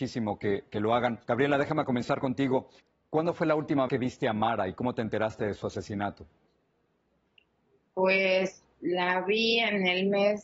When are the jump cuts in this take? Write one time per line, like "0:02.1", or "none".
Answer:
0:01.2
0:02.8
0:03.9